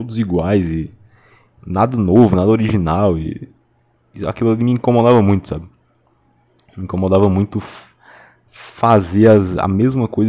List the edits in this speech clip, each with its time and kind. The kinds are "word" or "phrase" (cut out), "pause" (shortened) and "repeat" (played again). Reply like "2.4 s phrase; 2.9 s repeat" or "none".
none